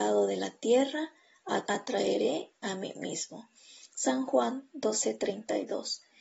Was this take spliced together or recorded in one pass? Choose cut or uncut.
cut